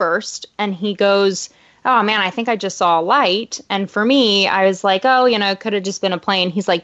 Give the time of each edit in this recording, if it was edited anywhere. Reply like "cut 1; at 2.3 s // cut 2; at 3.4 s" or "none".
none